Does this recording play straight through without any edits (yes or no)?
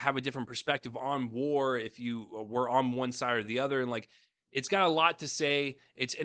yes